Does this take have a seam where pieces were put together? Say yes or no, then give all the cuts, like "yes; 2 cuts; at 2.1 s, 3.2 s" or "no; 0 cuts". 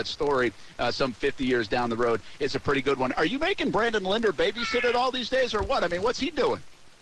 no; 0 cuts